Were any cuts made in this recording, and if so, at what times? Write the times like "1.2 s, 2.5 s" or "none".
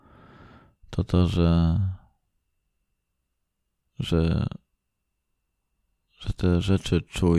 none